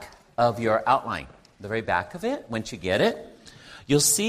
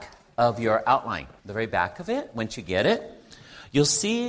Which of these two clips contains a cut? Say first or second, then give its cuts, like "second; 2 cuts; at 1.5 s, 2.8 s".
second; 1 cut; at 1.4 s